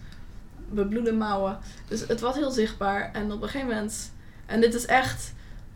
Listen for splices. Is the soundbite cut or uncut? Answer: uncut